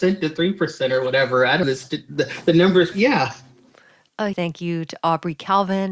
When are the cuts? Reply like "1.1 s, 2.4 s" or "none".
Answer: 1.6 s, 2.9 s, 4.3 s